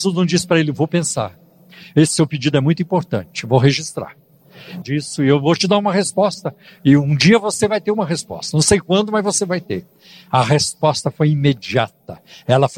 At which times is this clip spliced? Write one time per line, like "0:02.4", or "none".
0:04.8